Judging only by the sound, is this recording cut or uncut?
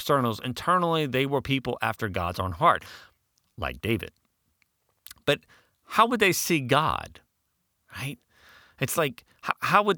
uncut